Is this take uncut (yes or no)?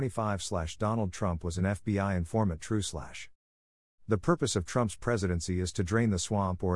yes